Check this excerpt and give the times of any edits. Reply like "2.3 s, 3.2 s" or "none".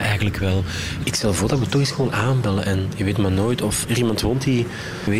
3.8 s